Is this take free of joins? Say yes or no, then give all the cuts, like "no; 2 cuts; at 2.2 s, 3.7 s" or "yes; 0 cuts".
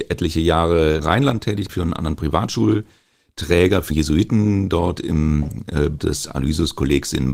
no; 4 cuts; at 1.0 s, 1.7 s, 3.9 s, 6.0 s